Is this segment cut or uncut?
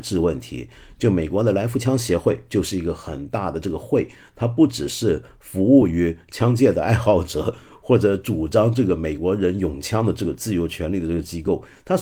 uncut